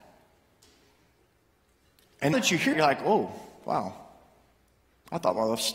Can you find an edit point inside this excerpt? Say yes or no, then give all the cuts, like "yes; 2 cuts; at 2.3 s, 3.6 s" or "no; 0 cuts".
yes; 2 cuts; at 2.3 s, 2.7 s